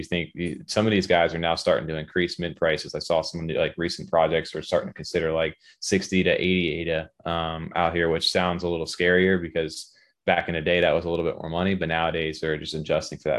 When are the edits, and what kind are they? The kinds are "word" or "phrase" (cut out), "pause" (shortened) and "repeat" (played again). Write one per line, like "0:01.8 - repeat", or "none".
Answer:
none

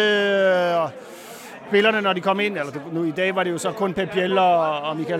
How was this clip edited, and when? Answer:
none

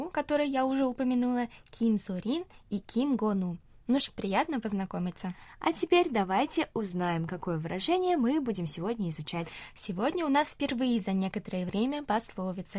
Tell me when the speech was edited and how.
0:04.0 - word

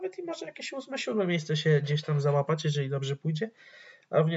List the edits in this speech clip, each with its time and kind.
none

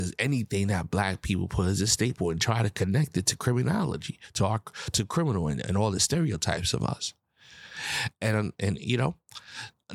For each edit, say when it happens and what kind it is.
none

